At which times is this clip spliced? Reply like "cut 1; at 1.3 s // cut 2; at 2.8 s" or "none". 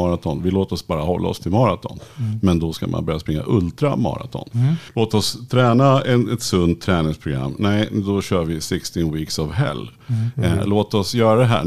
cut 1; at 4.9 s